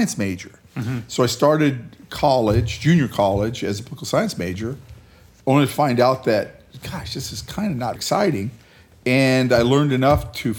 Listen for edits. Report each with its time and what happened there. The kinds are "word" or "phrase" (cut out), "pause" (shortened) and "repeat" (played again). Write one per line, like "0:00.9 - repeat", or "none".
0:07.9 - word